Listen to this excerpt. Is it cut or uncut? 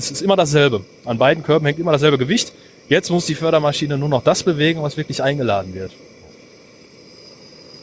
uncut